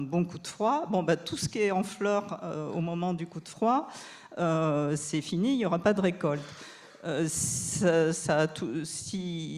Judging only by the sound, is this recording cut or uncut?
uncut